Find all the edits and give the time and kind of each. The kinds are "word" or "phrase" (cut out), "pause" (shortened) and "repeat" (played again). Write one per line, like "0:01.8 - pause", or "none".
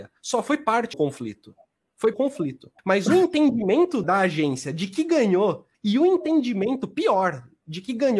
0:00.9 - word
0:02.1 - phrase
0:02.8 - pause
0:04.0 - phrase
0:05.7 - pause